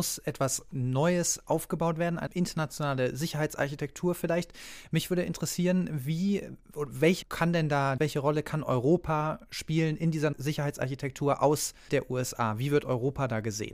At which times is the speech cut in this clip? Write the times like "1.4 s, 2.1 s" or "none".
2.3 s, 7.2 s, 8.0 s, 10.3 s, 11.9 s